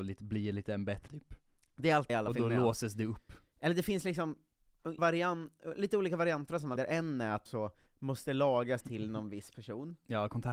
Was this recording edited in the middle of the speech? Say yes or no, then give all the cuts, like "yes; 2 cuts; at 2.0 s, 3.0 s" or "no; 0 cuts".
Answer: yes; 7 cuts; at 1.1 s, 2.1 s, 5.0 s, 6.8 s, 7.5 s, 7.9 s, 8.8 s